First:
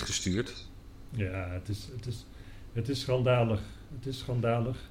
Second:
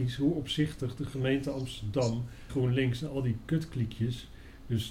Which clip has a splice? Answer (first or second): second